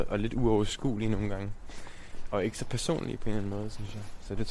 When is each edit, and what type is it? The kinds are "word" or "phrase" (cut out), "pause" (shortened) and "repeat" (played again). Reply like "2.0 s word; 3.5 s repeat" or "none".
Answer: none